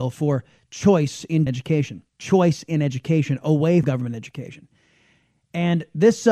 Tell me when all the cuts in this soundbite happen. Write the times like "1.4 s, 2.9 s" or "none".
1.5 s, 2.1 s, 3.8 s